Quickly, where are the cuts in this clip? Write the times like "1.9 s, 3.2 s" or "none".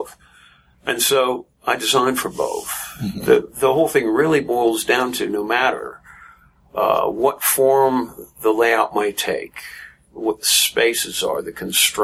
none